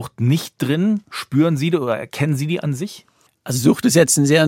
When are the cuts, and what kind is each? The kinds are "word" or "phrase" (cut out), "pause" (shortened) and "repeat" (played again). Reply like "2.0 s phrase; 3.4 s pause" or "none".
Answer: 3.3 s pause